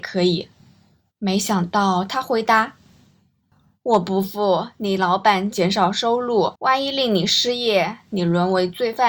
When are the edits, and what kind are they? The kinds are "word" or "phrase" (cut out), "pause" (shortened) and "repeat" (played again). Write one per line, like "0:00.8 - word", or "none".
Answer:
0:06.6 - pause